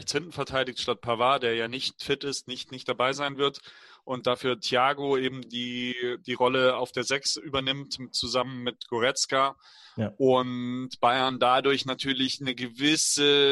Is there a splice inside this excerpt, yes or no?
no